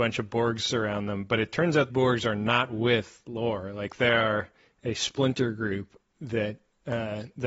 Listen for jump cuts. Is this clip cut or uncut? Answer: cut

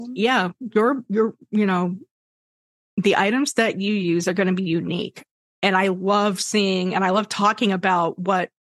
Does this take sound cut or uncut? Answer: uncut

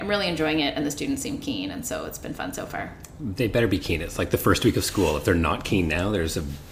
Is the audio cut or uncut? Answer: uncut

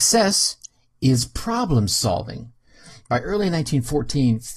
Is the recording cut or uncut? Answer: uncut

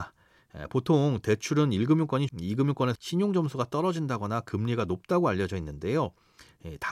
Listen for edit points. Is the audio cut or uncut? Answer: cut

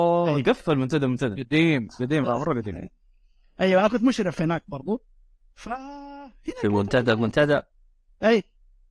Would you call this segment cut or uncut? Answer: uncut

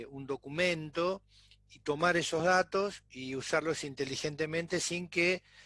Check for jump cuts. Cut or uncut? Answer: uncut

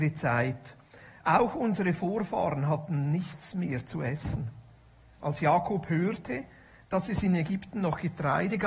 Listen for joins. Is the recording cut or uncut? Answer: uncut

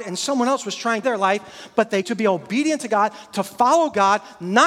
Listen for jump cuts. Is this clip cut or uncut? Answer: cut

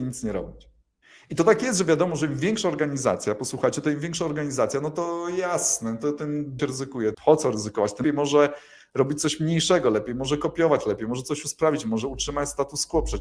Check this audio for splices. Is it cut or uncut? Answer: cut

